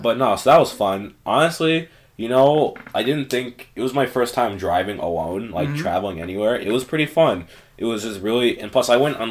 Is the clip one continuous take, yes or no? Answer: yes